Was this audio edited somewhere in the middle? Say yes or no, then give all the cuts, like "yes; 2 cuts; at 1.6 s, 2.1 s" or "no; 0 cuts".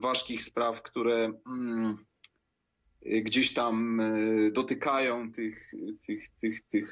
no; 0 cuts